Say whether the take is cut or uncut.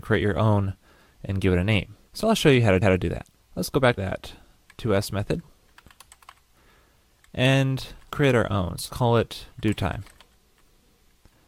cut